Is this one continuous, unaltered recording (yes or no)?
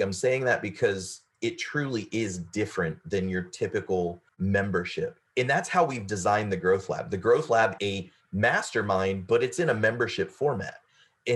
no